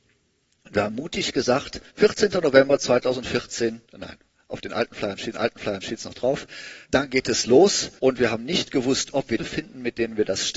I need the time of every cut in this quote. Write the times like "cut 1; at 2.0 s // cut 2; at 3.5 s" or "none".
cut 1; at 1.9 s // cut 2; at 3.8 s // cut 3; at 5.3 s // cut 4; at 6.8 s // cut 5; at 8.0 s // cut 6; at 9.4 s